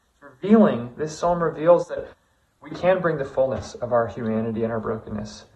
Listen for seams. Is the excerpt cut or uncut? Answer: uncut